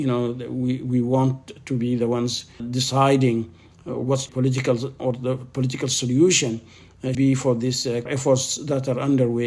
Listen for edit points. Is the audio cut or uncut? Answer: cut